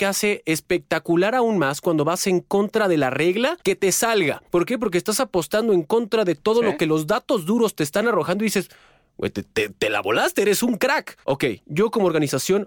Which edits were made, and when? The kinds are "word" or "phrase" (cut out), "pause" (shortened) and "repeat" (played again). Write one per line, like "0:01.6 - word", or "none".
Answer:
0:03.6 - pause
0:04.5 - pause
0:11.2 - pause